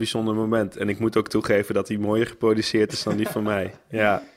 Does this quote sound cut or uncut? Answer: uncut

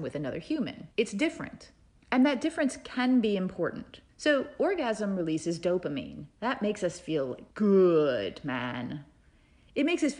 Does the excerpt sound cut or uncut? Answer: cut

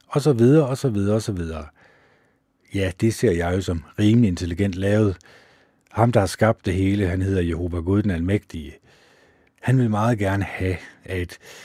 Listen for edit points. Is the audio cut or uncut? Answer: uncut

